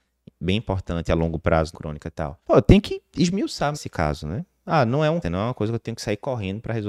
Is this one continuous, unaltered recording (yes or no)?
no